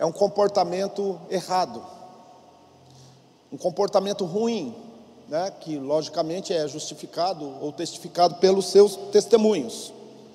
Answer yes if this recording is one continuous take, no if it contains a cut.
yes